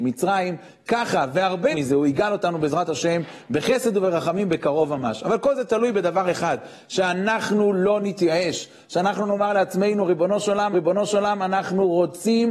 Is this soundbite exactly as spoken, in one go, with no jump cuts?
no; 2 cuts; at 1.7 s, 10.7 s

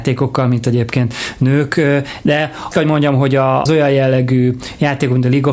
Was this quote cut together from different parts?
yes; 2 cuts; at 2.7 s, 3.7 s

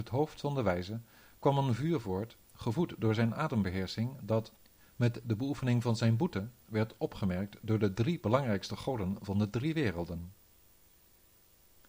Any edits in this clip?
no; 0 cuts

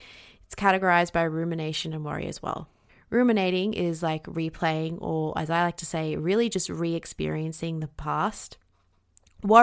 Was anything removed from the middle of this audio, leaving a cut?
yes; 1 cut; at 2.9 s

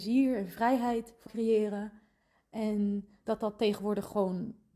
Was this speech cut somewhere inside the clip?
yes; 1 cut; at 1.3 s

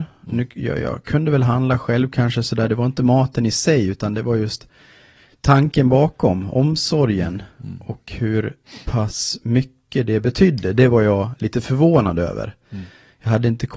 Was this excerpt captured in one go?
yes; 0 cuts

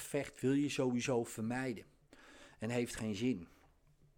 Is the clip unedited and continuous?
yes; 0 cuts

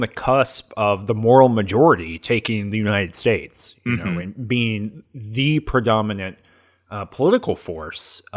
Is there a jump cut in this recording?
no; 0 cuts

